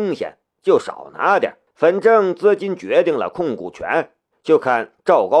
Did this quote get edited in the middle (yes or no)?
yes